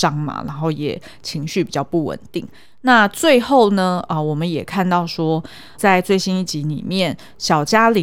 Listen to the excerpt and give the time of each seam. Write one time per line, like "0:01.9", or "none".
0:05.8